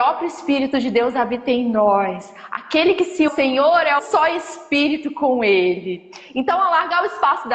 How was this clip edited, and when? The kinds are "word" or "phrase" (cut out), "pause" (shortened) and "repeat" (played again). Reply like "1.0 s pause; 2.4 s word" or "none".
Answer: 3.3 s phrase; 4.0 s word